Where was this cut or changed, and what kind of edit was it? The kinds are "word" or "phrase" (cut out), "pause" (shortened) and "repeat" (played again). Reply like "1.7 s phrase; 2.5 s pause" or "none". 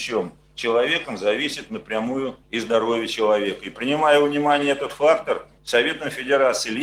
2.4 s pause; 5.6 s pause